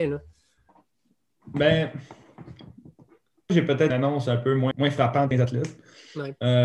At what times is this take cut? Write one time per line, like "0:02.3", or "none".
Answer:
0:03.5
0:03.9
0:04.7
0:05.3

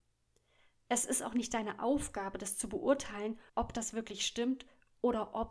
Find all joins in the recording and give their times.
0:03.5

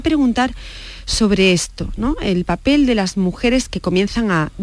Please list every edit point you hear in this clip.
none

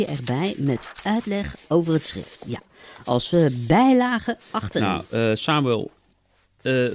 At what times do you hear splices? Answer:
none

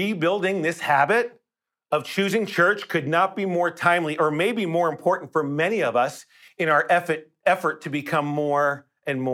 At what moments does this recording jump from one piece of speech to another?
none

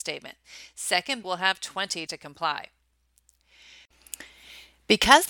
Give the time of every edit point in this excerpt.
0:01.2
0:02.1

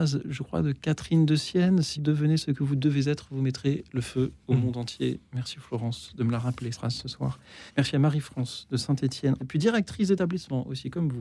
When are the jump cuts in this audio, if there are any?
0:02.0
0:06.7
0:07.7
0:09.4

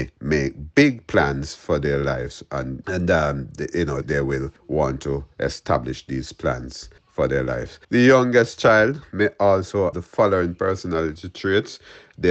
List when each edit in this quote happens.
0:02.8
0:04.0
0:04.6
0:07.0
0:07.8
0:09.9

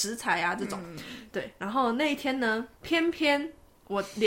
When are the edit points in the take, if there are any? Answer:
0:02.8

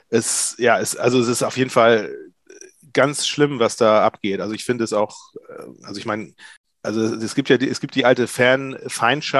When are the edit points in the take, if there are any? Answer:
none

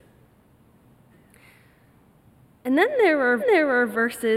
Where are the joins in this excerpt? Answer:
0:03.4

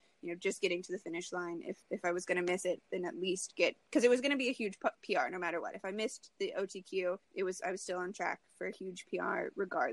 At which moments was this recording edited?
0:01.8
0:03.8
0:07.2

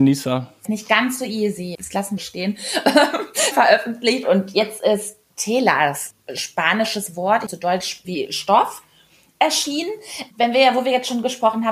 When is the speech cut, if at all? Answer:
0:01.7
0:02.2
0:03.5
0:07.5
0:08.0
0:10.3

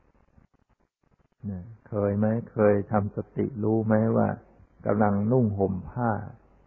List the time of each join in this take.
0:04.6

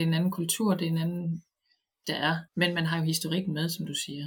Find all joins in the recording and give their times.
0:02.0
0:02.5

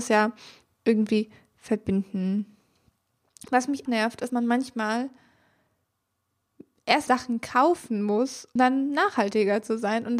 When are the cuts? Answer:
0:03.9
0:04.3
0:07.1
0:08.6

